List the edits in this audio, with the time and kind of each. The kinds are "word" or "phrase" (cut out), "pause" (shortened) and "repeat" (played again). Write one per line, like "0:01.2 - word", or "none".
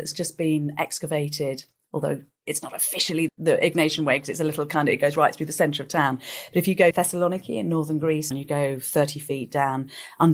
0:03.3 - word
0:06.9 - word
0:08.3 - word